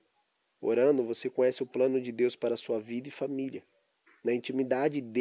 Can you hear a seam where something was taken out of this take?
no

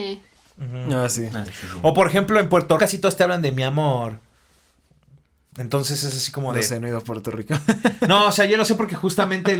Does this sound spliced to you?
yes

